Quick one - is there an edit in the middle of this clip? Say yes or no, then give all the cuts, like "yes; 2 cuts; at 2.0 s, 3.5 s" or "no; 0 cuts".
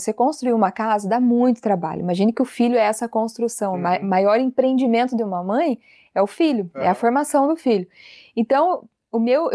no; 0 cuts